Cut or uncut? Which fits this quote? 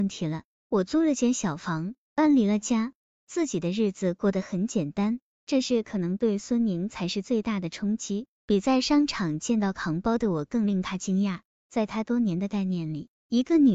uncut